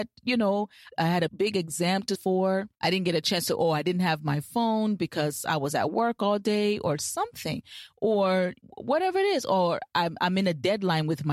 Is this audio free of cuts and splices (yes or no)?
no